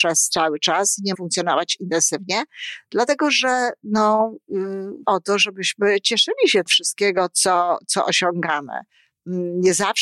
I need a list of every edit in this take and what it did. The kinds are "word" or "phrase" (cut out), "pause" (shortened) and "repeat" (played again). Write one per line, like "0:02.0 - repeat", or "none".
0:01.1 - word
0:05.0 - word
0:06.7 - phrase